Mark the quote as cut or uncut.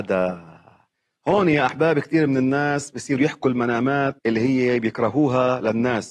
cut